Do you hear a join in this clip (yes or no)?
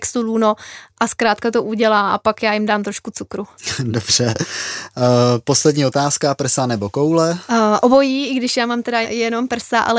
yes